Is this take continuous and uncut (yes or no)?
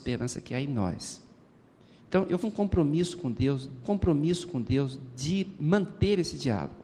no